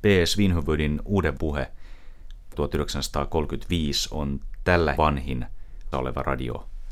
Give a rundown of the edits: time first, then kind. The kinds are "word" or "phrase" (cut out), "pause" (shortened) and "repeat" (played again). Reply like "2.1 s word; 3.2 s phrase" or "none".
1.4 s word; 2.5 s word; 4.9 s word; 5.9 s word